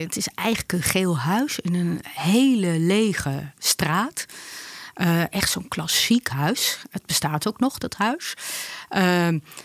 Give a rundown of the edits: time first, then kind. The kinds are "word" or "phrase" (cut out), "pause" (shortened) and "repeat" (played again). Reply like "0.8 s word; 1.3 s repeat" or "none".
none